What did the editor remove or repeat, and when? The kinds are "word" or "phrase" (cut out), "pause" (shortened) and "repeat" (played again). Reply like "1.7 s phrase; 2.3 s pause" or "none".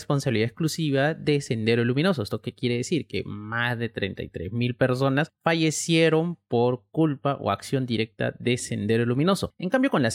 none